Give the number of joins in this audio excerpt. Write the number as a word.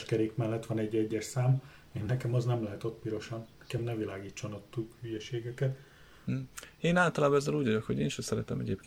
zero